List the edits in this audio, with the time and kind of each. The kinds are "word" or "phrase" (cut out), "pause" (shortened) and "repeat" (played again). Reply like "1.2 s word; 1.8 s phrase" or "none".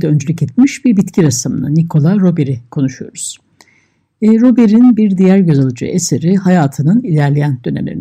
none